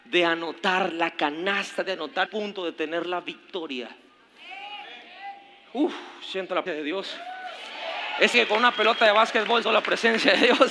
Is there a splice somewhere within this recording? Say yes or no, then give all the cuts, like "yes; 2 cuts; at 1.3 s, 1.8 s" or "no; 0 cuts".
yes; 4 cuts; at 2.3 s, 6.7 s, 8.3 s, 9.6 s